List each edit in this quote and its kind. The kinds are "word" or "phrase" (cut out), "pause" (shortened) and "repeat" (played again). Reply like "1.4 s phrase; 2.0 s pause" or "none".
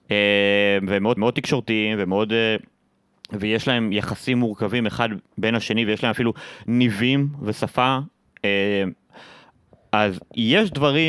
1.2 s repeat; 5.3 s pause